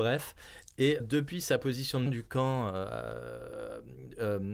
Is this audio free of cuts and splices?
no; 2 cuts; at 1.0 s, 2.1 s

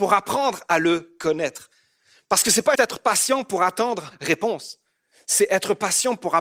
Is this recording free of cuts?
no; 2 cuts; at 2.8 s, 4.1 s

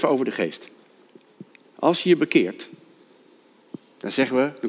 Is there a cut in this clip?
yes; 1 cut; at 1.6 s

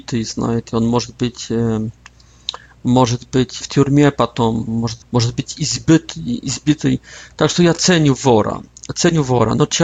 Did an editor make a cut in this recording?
yes; 2 cuts; at 3.6 s, 5.0 s

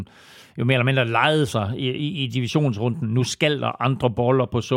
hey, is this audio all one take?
yes; 0 cuts

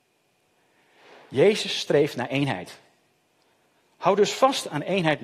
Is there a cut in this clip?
no; 0 cuts

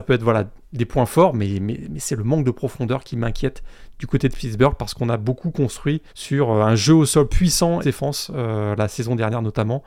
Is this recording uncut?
no; 2 cuts; at 6.1 s, 7.8 s

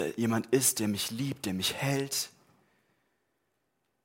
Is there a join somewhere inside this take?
no; 0 cuts

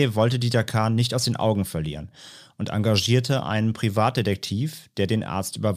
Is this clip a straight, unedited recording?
yes; 0 cuts

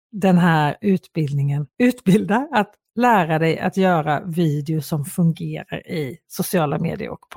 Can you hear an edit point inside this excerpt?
yes; 1 cut; at 1.7 s

